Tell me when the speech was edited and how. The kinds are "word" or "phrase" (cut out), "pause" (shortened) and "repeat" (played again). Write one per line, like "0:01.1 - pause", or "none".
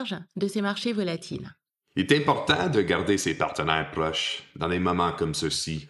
none